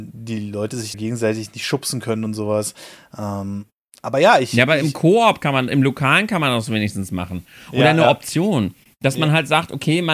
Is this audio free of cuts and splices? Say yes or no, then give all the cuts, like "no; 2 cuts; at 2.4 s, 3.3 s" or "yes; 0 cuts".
no; 1 cut; at 0.9 s